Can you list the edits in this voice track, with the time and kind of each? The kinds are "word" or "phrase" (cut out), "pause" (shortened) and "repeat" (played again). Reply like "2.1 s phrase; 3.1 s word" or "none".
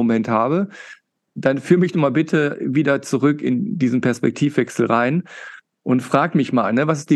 none